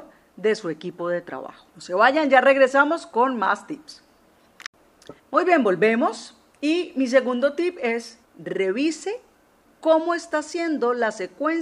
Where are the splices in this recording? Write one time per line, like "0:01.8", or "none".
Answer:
0:01.7
0:05.2
0:08.2